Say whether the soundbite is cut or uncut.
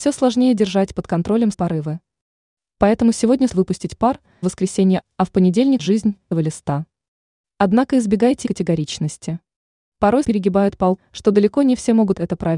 cut